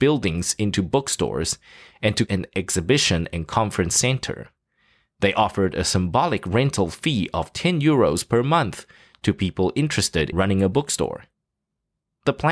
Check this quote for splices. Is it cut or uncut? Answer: cut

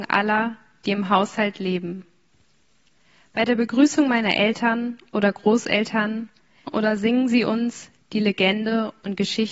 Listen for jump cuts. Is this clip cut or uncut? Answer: cut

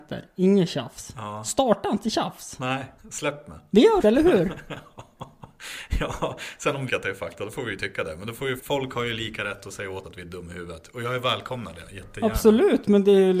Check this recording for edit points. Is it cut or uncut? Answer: cut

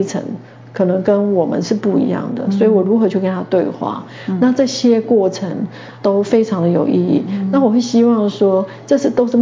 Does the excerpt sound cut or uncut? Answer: cut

